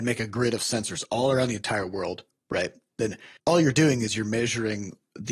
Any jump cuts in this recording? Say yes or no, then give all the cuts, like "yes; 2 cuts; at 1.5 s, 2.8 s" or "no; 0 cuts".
no; 0 cuts